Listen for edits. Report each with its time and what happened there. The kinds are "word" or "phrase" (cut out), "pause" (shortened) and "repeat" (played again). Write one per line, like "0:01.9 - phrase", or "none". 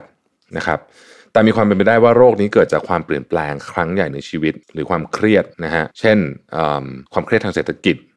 0:04.6 - pause
0:05.5 - pause
0:05.9 - pause
0:07.1 - pause

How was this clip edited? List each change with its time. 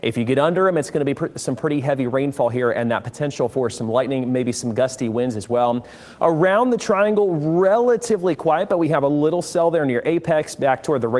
none

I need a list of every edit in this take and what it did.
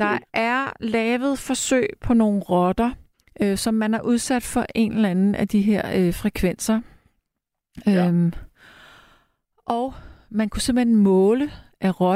0:03.1 - pause

